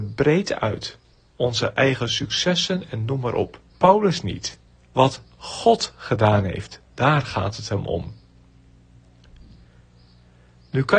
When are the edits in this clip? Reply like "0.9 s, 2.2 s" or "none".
1.1 s, 3.7 s, 4.7 s, 6.8 s